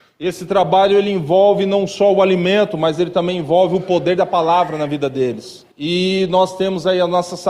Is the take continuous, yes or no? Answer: no